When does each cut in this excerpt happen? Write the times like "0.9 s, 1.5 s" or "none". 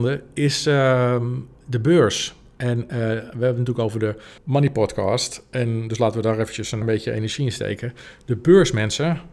4.4 s, 6.8 s